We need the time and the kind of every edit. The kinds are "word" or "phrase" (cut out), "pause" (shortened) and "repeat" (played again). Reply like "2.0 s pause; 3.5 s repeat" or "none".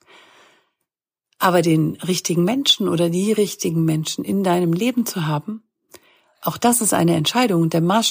none